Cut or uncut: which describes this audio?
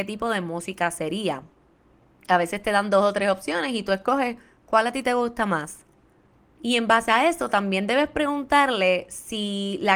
uncut